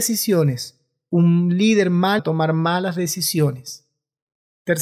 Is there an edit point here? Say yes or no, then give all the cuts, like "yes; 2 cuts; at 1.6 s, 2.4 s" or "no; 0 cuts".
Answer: yes; 1 cut; at 2.2 s